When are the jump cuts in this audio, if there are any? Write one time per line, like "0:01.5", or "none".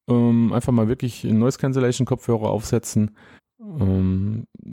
0:03.4